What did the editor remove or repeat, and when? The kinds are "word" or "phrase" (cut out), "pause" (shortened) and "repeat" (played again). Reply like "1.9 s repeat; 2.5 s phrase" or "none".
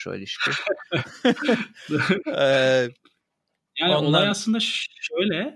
none